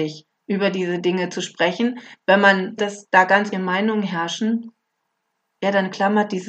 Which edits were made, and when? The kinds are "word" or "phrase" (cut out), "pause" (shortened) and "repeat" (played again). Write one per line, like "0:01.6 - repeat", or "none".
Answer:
0:02.8 - word
0:03.5 - word

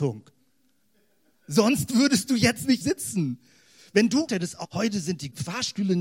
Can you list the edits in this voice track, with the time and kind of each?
0:02.8 - word
0:04.3 - word
0:04.6 - word

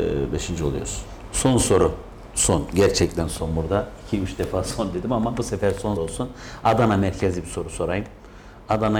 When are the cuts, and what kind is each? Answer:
0:06.0 - word

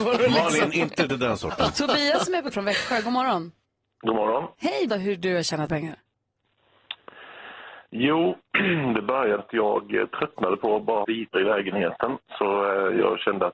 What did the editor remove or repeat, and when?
0:01.1 - phrase
0:02.5 - word
0:03.6 - pause
0:04.9 - word
0:05.7 - word
0:09.4 - word
0:11.0 - word
0:11.3 - word

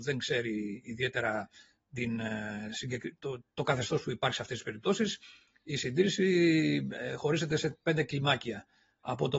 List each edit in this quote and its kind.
none

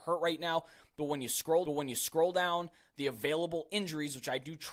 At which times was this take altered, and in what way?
0:01.7 - repeat

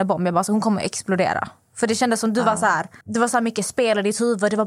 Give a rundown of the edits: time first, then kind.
0:03.0 - pause

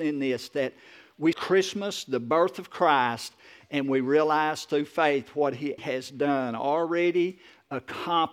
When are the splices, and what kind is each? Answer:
0:01.3 - word
0:05.8 - word

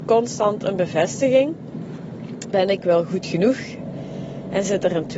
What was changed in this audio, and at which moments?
0:02.5 - word

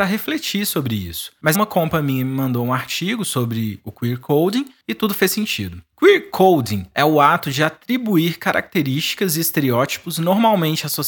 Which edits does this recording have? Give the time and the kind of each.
0:01.5 - word

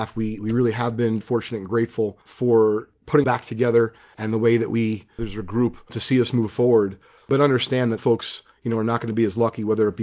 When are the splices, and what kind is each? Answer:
0:01.2 - word
0:02.2 - pause
0:03.2 - word
0:05.2 - phrase
0:05.9 - phrase
0:08.0 - word

